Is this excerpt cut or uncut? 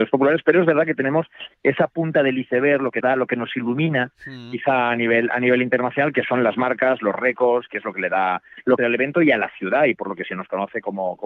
cut